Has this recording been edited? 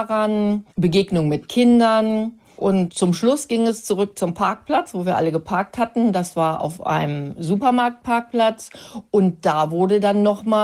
no; 0 cuts

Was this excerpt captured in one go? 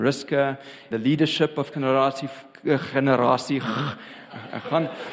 no; 2 cuts; at 0.9 s, 1.7 s

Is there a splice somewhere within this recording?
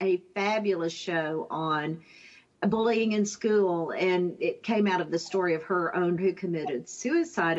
yes; 1 cut; at 6.2 s

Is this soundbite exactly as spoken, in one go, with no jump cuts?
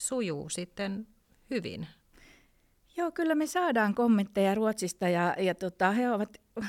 yes; 0 cuts

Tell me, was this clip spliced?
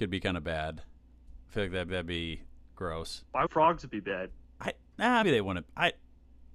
yes; 4 cuts; at 1.4 s, 1.9 s, 3.5 s, 5.2 s

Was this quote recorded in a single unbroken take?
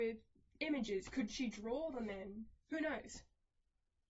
yes; 0 cuts

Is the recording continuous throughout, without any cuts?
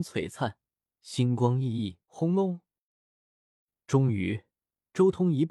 no; 1 cut; at 2.0 s

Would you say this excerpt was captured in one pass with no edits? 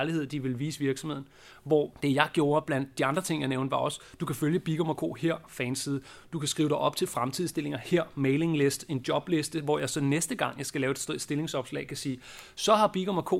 yes; 0 cuts

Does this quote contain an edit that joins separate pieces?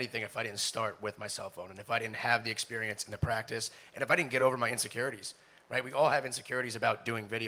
no; 0 cuts

